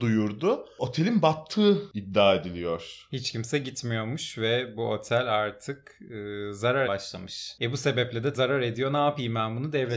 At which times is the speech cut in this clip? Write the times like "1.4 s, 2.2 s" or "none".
6.8 s, 8.3 s

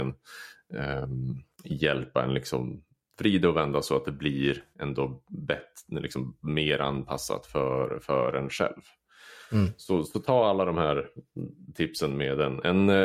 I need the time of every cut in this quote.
1.5 s

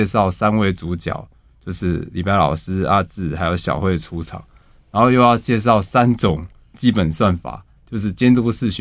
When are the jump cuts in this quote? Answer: 6.7 s

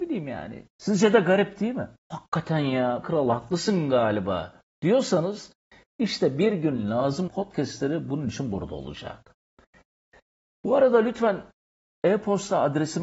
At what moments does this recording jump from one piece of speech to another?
2.0 s, 3.0 s, 7.3 s

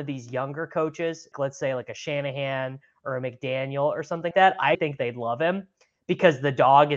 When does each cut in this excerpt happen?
1.3 s, 4.3 s, 4.7 s

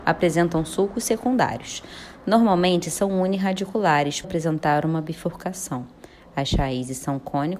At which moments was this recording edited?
4.2 s

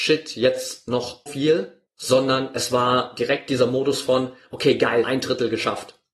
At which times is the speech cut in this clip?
1.3 s, 1.9 s, 5.0 s

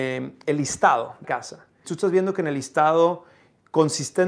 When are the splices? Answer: 1.2 s, 1.8 s

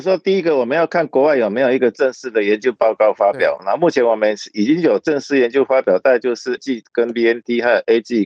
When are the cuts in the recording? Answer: 6.6 s

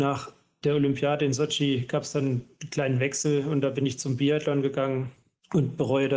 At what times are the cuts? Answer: none

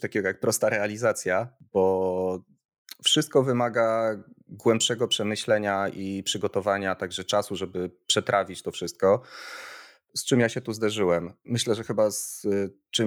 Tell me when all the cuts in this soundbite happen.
none

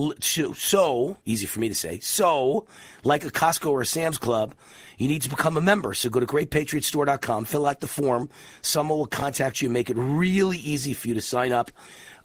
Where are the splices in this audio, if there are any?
1.2 s

